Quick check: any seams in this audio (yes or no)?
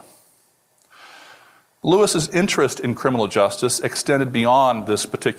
no